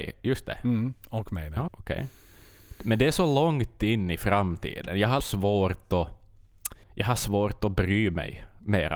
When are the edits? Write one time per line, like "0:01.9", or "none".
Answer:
0:01.7
0:05.2
0:06.8